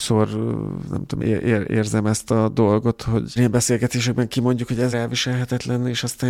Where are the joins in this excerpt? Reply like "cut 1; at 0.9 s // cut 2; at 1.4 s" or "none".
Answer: cut 1; at 1.2 s // cut 2; at 3.4 s // cut 3; at 4.9 s